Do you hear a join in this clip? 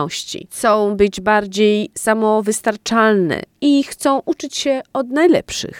no; 0 cuts

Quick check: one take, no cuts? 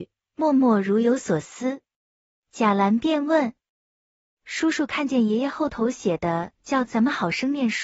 yes; 0 cuts

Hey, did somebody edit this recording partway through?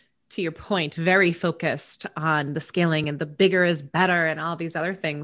no; 0 cuts

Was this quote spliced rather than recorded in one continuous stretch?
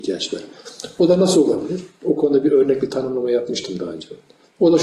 no; 0 cuts

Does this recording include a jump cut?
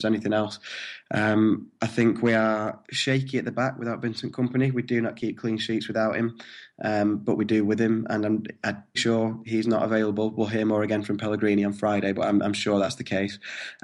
yes; 1 cut; at 8.9 s

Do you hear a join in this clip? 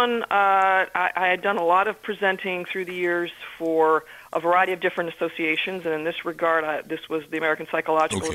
no; 0 cuts

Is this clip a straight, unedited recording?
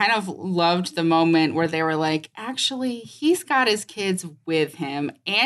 yes; 0 cuts

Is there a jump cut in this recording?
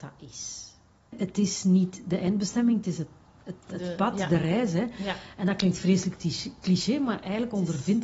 no; 0 cuts

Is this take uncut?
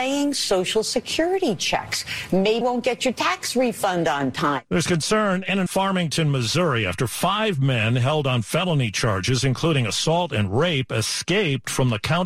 no; 2 cuts; at 2.6 s, 5.7 s

